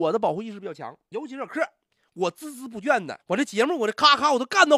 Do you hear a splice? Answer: yes; 1 cut; at 3.2 s

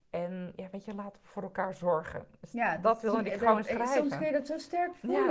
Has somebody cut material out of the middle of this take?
no; 0 cuts

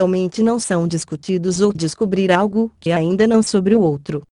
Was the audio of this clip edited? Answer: yes; 3 cuts; at 1.7 s, 2.9 s, 3.4 s

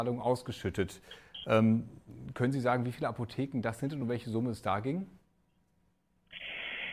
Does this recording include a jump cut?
no; 0 cuts

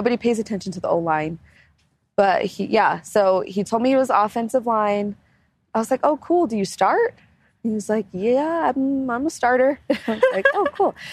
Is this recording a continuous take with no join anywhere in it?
yes; 0 cuts

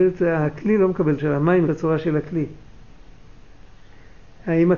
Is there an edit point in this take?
yes; 2 cuts; at 1.2 s, 1.7 s

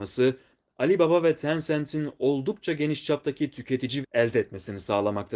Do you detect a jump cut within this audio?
yes; 1 cut; at 4.0 s

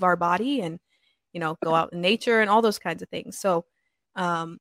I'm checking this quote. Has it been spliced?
no; 0 cuts

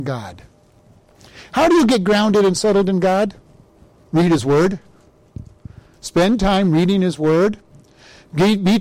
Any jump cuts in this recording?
no; 0 cuts

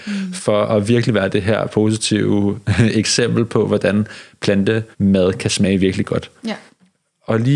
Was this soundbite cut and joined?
yes; 1 cut; at 4.9 s

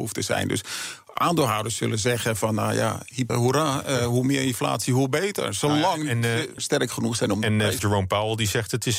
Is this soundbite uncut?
no; 3 cuts; at 3.3 s, 6.6 s, 7.8 s

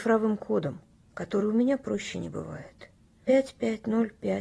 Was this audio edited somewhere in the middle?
no; 0 cuts

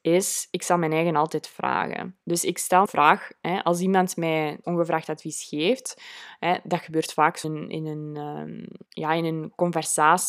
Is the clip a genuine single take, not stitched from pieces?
no; 5 cuts; at 2.2 s, 2.8 s, 4.6 s, 7.4 s, 8.9 s

